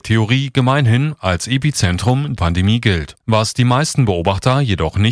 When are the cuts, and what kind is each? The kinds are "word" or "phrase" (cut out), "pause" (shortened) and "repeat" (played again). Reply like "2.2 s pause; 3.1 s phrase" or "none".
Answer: 2.4 s word; 3.2 s pause